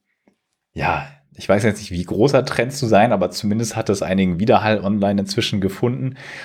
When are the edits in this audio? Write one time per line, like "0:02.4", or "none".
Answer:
none